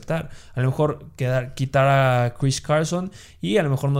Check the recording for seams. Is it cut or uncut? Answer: uncut